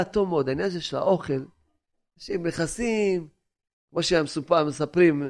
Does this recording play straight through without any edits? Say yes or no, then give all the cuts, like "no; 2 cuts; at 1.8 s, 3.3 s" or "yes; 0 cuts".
yes; 0 cuts